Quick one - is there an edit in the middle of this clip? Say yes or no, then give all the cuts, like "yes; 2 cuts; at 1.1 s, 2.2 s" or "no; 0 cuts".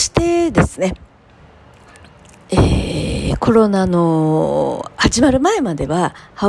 no; 0 cuts